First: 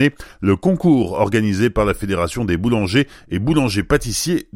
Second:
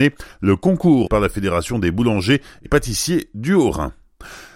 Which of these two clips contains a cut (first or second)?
second